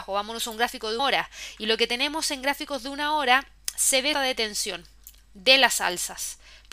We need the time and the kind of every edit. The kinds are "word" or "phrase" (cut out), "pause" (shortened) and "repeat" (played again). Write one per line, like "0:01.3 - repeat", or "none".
0:01.0 - word
0:04.1 - word

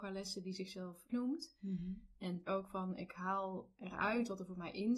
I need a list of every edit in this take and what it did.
0:01.1 - phrase
0:02.5 - phrase

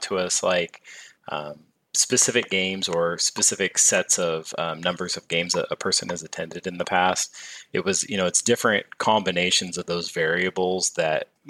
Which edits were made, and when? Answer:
none

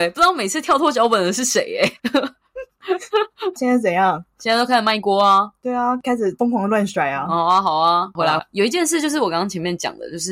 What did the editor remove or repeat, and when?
0:03.6 - phrase
0:08.4 - phrase

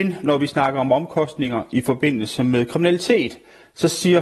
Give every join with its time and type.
none

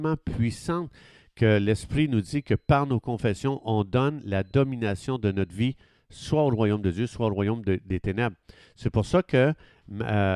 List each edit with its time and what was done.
none

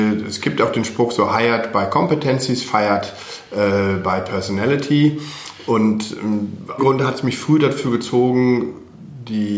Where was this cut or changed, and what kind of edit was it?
0:06.8 - phrase

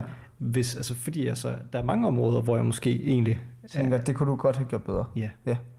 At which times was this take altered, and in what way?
none

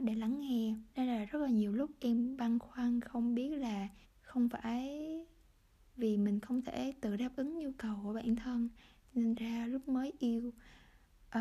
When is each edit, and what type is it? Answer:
0:00.9 - pause
0:04.0 - pause
0:09.4 - word

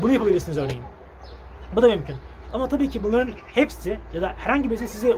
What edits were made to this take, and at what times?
none

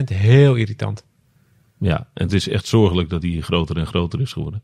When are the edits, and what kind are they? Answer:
none

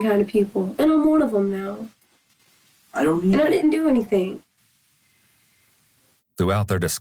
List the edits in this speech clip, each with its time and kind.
0:03.6 - word

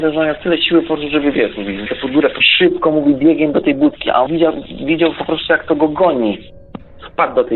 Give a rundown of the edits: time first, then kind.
0:01.9 - word
0:02.4 - phrase
0:04.3 - word

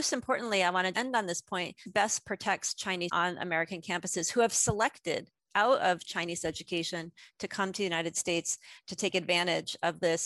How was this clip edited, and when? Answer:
0:00.9 - word
0:01.9 - word
0:03.1 - word

